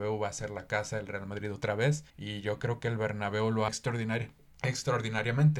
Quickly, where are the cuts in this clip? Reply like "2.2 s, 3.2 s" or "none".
2.1 s, 3.7 s